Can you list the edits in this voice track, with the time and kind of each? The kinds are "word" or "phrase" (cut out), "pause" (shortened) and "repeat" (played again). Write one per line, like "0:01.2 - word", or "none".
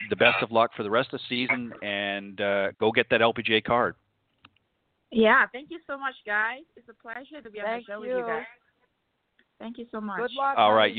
none